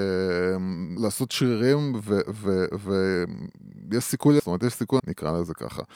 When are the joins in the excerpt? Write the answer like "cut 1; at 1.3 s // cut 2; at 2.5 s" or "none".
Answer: cut 1; at 1.0 s // cut 2; at 4.4 s // cut 3; at 5.0 s